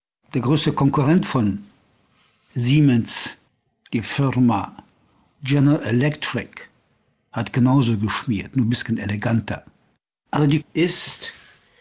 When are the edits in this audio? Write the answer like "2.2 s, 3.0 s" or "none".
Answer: 3.5 s, 10.6 s